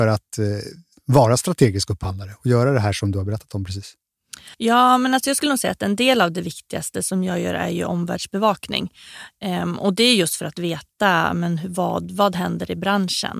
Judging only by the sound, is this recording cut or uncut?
cut